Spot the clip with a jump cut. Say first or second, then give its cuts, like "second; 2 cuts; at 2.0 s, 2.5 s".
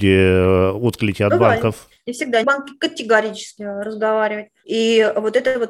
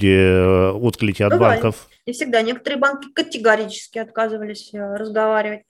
first; 2 cuts; at 2.4 s, 3.6 s